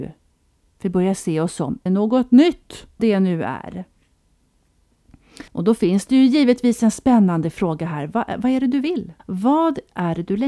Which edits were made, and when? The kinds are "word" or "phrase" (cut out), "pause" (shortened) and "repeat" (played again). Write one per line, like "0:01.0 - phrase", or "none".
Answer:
0:01.9 - word
0:03.0 - word
0:05.5 - pause
0:09.2 - pause